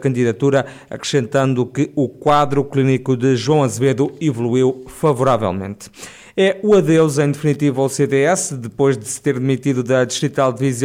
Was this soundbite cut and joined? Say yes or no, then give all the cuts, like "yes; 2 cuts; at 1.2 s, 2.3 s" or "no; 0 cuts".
no; 0 cuts